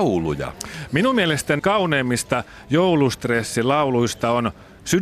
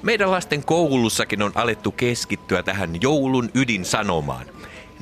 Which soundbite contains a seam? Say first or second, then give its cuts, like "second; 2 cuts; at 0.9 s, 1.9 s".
first; 1 cut; at 1.6 s